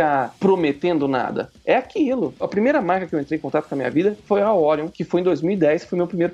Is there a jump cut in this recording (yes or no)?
no